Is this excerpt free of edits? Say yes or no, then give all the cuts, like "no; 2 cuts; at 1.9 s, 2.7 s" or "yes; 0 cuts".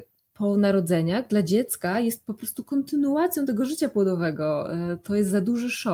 yes; 0 cuts